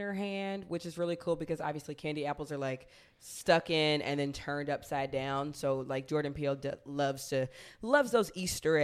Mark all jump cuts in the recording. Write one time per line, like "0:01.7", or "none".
none